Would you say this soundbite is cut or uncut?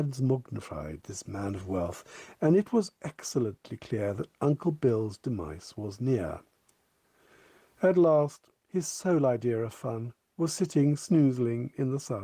uncut